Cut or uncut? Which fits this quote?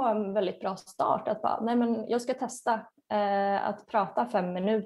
uncut